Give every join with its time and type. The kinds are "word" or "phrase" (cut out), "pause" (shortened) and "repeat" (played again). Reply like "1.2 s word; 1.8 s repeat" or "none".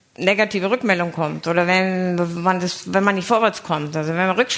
none